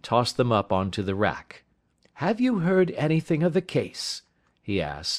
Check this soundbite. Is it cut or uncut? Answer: cut